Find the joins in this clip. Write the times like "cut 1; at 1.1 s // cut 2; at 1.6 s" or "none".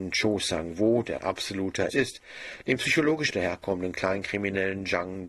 cut 1; at 1.2 s // cut 2; at 1.9 s // cut 3; at 3.3 s